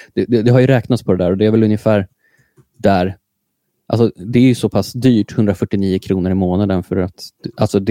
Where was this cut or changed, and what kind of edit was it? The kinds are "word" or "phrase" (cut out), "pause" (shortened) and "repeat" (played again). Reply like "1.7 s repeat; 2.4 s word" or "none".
none